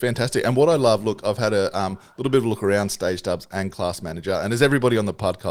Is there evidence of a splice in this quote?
no; 0 cuts

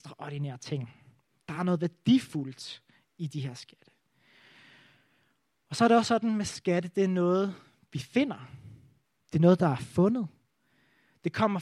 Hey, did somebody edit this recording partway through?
no; 0 cuts

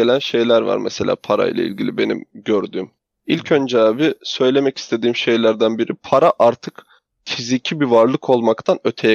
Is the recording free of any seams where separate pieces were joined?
yes; 0 cuts

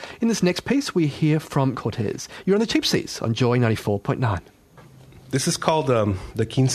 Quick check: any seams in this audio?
yes; 1 cut; at 1.7 s

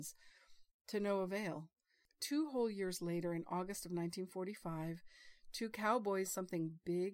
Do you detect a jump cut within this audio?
yes; 1 cut; at 6.3 s

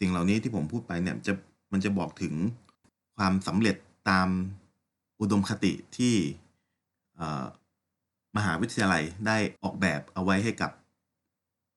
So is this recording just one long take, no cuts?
no; 1 cut; at 9.6 s

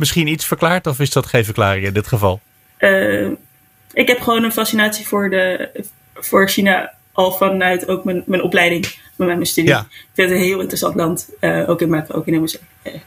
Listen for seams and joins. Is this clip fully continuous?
yes; 0 cuts

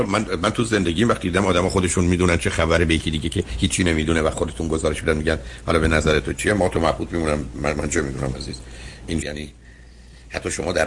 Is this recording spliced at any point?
yes; 1 cut; at 9.2 s

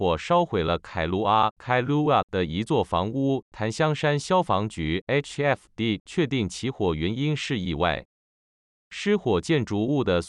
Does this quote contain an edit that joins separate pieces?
no; 0 cuts

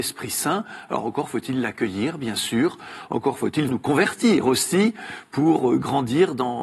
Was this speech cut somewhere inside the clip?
yes; 1 cut; at 3.7 s

